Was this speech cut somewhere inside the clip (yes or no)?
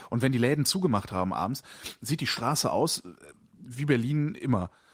no